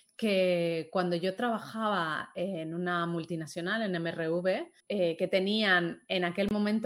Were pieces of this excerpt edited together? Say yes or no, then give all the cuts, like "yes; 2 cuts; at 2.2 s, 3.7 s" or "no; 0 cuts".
yes; 1 cut; at 4.8 s